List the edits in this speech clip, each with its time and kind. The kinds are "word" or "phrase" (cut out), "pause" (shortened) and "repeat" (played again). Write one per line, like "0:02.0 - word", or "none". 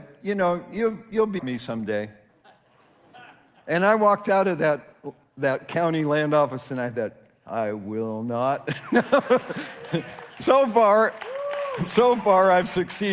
0:01.4 - word